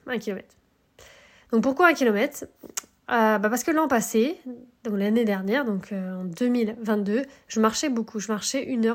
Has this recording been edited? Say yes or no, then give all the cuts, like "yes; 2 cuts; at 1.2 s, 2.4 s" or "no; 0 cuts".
no; 0 cuts